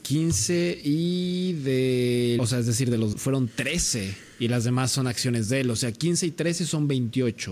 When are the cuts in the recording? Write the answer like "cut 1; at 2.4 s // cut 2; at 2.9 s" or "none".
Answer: cut 1; at 2.4 s // cut 2; at 3.1 s